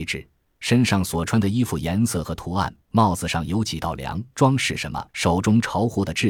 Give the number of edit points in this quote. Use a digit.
3